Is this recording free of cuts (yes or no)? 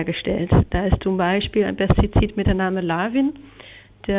yes